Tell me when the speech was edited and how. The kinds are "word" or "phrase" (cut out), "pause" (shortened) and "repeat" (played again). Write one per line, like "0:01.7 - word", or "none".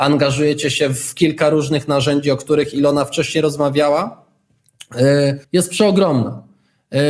0:05.4 - pause